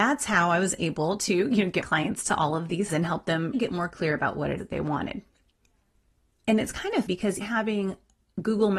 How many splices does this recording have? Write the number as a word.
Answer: six